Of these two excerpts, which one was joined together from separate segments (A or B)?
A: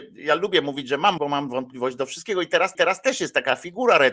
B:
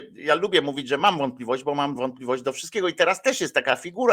A